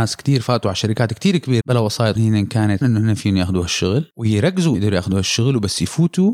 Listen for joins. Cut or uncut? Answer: cut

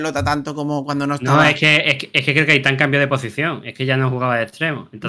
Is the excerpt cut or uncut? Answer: uncut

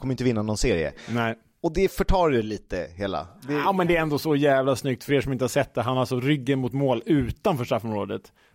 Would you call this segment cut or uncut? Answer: uncut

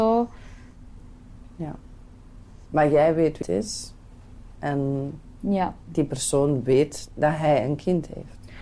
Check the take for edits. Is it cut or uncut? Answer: cut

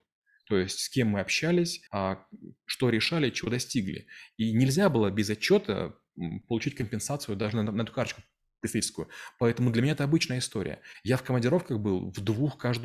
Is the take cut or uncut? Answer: cut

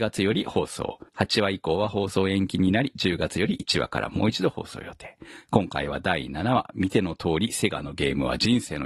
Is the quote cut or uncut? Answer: cut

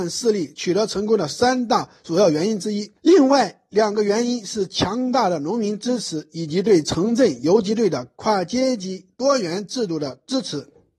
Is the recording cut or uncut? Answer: cut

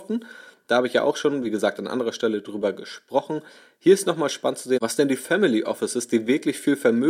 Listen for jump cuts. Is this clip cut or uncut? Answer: uncut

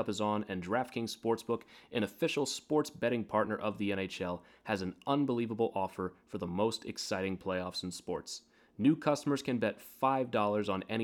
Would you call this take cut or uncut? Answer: uncut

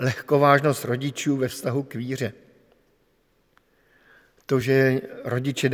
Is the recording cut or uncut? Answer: uncut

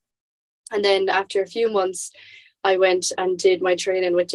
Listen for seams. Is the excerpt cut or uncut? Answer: uncut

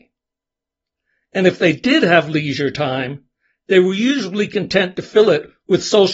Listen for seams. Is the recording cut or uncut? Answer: uncut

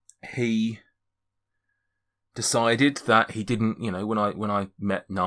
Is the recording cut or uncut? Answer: uncut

